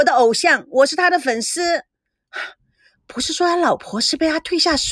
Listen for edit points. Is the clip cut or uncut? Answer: uncut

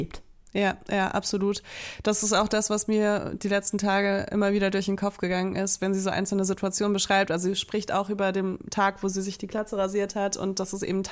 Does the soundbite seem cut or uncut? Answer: uncut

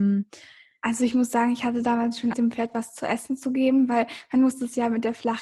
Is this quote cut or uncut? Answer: cut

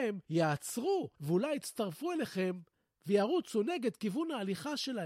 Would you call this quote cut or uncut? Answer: uncut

